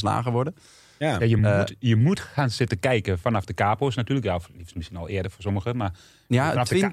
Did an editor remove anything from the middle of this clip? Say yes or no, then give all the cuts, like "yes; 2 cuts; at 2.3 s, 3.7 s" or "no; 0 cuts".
no; 0 cuts